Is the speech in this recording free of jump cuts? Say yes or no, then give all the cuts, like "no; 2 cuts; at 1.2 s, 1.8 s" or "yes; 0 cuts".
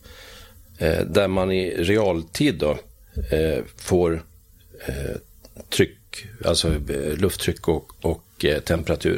yes; 0 cuts